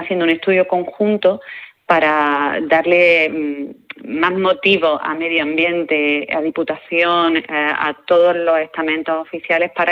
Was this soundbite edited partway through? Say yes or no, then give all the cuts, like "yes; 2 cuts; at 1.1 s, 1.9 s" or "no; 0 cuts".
no; 0 cuts